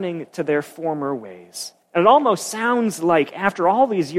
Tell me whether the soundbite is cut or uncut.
cut